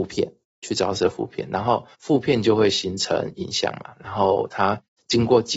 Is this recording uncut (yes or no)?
no